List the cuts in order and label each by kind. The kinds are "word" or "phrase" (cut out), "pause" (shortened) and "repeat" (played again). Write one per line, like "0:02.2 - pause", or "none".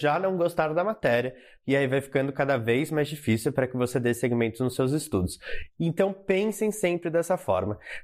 none